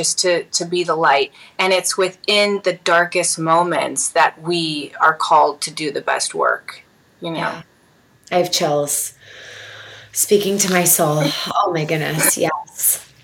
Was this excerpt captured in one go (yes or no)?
yes